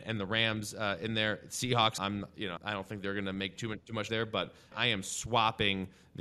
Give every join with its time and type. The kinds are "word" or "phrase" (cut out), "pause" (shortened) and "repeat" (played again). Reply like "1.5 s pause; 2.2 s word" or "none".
2.0 s word; 2.6 s word; 4.1 s word; 4.7 s word